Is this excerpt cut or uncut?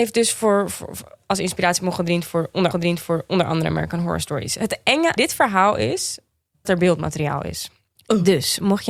cut